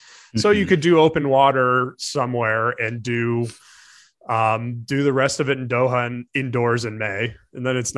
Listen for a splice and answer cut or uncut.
uncut